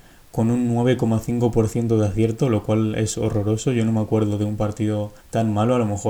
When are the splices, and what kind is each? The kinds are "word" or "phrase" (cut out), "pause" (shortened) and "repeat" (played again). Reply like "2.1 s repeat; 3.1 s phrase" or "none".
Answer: 5.2 s pause